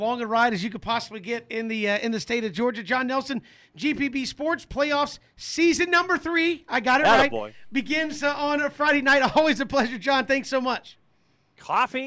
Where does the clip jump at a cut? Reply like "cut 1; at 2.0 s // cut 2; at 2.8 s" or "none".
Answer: none

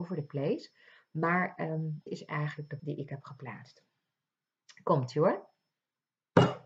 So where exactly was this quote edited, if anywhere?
cut 1; at 2.1 s // cut 2; at 2.8 s

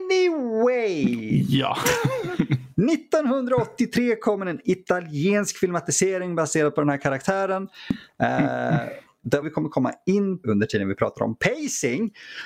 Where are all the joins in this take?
cut 1; at 9.4 s // cut 2; at 10.4 s

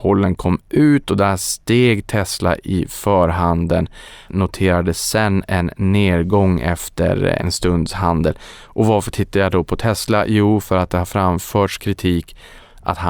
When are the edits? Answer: cut 1; at 4.3 s // cut 2; at 7.4 s

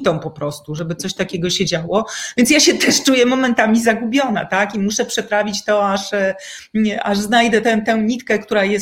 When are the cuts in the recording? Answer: cut 1; at 7.6 s

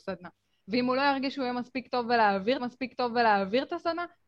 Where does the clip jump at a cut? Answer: cut 1; at 2.6 s

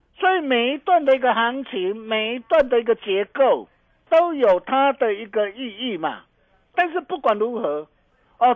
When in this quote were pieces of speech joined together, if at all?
cut 1; at 4.1 s // cut 2; at 6.7 s

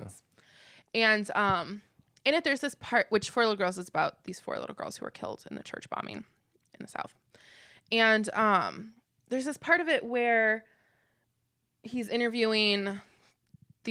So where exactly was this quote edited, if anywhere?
none

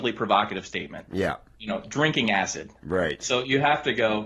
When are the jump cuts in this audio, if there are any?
none

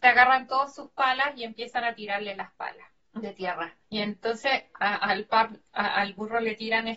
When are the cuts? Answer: cut 1; at 3.0 s // cut 2; at 3.8 s

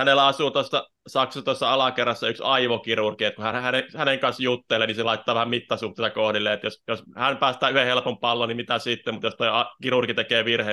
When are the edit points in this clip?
none

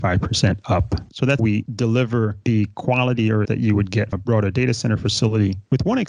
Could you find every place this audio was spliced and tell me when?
cut 1; at 1.4 s // cut 2; at 3.4 s // cut 3; at 4.1 s

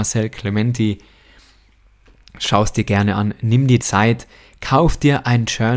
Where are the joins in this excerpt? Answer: cut 1; at 3.8 s

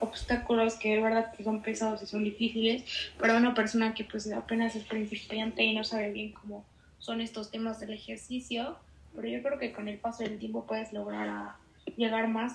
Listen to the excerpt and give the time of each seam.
none

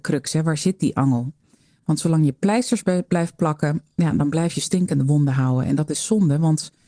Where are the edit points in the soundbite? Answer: none

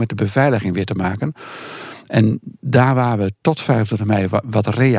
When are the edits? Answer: none

